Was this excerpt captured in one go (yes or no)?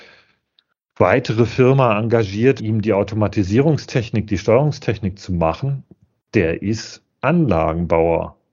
no